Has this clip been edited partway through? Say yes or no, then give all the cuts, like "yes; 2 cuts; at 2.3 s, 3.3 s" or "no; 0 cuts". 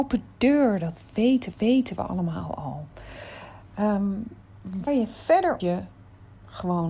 yes; 3 cuts; at 1.5 s, 4.9 s, 5.6 s